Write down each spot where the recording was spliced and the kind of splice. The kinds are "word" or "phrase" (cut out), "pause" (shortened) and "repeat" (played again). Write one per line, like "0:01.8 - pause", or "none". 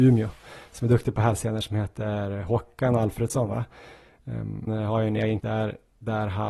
0:04.7 - word
0:05.4 - word